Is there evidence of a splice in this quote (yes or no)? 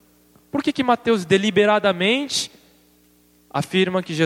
no